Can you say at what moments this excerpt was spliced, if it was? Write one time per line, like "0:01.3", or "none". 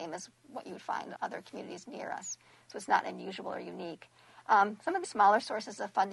0:01.2
0:05.0